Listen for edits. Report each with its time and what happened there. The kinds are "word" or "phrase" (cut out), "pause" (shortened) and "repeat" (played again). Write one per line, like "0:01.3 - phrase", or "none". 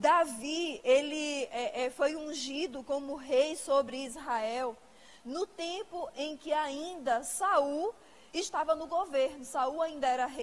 none